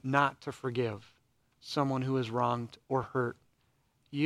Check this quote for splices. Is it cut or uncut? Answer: uncut